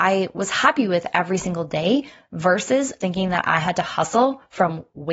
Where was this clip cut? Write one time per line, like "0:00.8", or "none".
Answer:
0:03.0